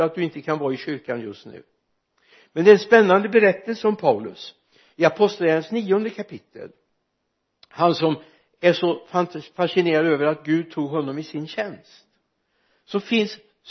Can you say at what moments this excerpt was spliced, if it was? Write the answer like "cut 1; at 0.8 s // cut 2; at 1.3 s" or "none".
none